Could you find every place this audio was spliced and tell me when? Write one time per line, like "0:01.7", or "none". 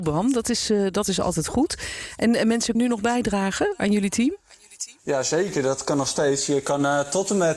0:02.7
0:05.0